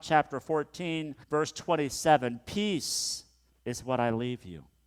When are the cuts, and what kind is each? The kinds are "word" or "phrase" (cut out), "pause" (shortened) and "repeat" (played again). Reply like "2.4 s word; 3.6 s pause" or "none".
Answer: 1.2 s pause; 3.5 s pause